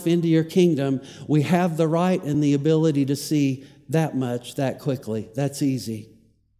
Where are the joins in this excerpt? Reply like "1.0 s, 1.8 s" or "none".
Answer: none